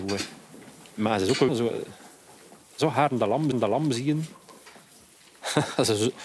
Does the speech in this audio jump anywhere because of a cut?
yes; 2 cuts; at 1.5 s, 3.5 s

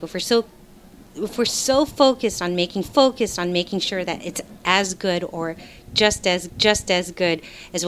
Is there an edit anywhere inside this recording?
yes; 2 cuts; at 2.8 s, 6.5 s

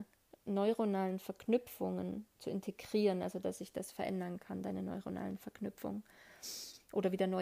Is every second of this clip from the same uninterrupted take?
yes; 0 cuts

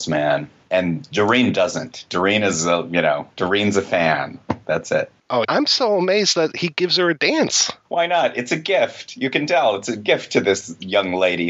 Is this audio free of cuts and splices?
no; 1 cut; at 5.4 s

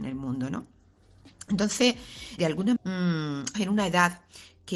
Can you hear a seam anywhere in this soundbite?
yes; 3 cuts; at 2.4 s, 2.8 s, 3.5 s

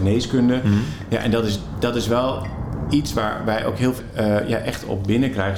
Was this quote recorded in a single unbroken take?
no; 1 cut; at 4.0 s

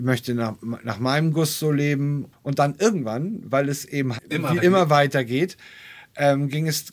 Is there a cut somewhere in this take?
yes; 2 cuts; at 4.2 s, 4.6 s

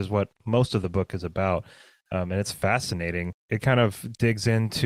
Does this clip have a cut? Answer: no; 0 cuts

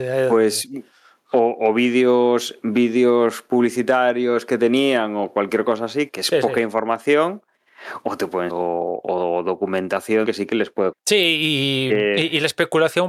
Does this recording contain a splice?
yes; 4 cuts; at 6.1 s, 8.5 s, 10.2 s, 10.9 s

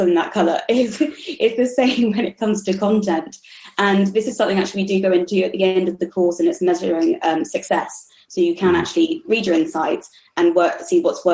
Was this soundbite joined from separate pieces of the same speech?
no; 0 cuts

